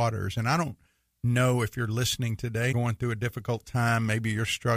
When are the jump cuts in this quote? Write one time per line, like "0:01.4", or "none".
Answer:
0:02.7